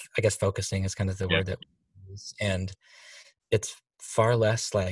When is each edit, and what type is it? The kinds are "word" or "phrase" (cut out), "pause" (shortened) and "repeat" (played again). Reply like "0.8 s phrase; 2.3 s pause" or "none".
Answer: 3.4 s word